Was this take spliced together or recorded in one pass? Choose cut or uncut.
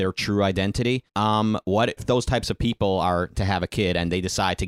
cut